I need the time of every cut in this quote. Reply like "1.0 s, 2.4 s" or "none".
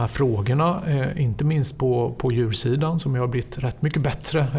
none